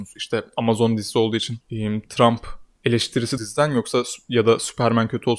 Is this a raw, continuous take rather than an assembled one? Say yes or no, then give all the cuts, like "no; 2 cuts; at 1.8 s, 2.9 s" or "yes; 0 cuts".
no; 3 cuts; at 1.6 s, 2.8 s, 3.4 s